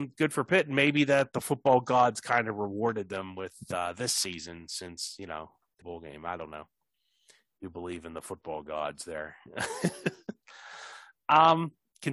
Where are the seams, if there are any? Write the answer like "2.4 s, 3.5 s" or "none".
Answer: 5.8 s